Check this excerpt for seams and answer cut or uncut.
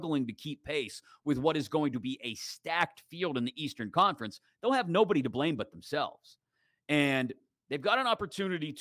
uncut